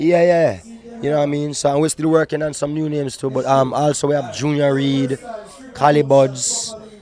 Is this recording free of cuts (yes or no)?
yes